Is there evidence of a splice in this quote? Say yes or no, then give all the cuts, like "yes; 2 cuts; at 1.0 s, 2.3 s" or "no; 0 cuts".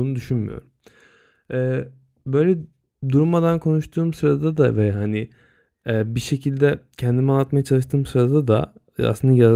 no; 0 cuts